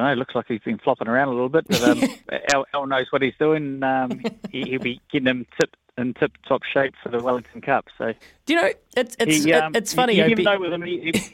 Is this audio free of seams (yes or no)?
no